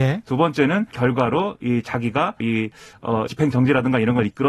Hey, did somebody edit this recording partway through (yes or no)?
yes